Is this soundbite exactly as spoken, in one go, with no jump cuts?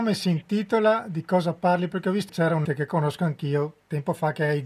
no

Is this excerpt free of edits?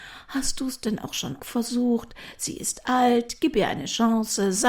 no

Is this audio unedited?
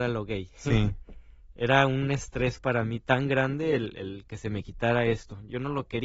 yes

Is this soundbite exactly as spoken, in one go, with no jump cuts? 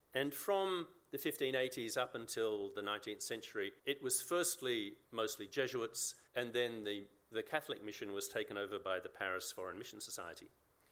no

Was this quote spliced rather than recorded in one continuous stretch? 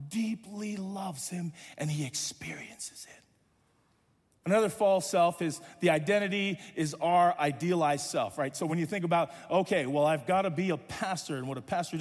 no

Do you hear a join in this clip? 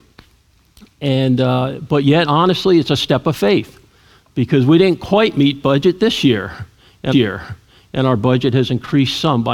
yes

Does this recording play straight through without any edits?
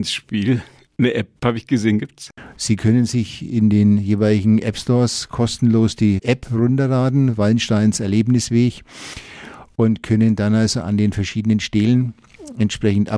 no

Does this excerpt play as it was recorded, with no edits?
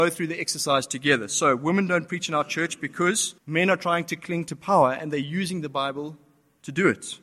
no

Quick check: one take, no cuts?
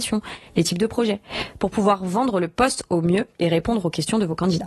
yes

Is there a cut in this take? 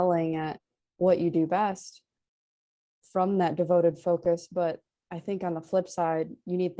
no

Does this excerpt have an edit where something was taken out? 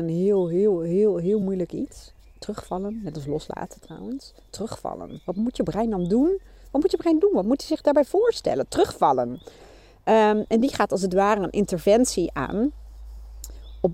no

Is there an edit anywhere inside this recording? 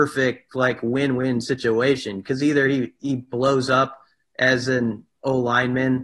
no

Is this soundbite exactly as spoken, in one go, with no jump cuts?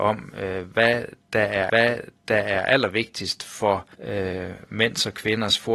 no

